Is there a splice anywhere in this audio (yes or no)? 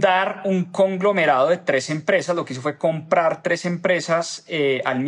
no